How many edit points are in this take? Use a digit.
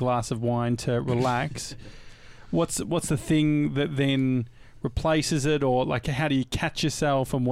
0